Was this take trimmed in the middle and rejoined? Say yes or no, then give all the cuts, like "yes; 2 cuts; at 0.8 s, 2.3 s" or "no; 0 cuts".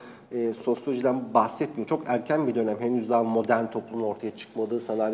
no; 0 cuts